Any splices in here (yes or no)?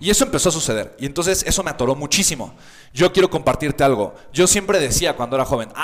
no